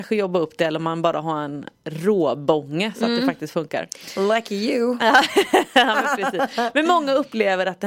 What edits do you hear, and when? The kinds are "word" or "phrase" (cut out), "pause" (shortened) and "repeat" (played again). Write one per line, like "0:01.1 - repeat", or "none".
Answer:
0:01.7 - pause

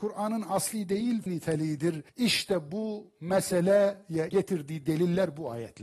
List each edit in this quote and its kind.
0:01.3 - phrase
0:02.1 - pause
0:04.3 - phrase

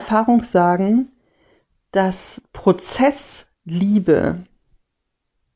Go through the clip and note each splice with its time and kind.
none

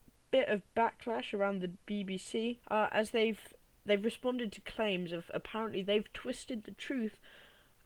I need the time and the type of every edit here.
0:02.6 - pause
0:03.7 - pause

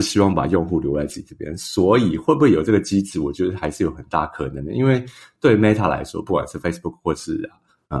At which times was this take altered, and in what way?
none

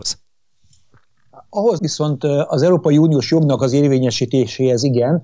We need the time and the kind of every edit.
0:01.8 - phrase

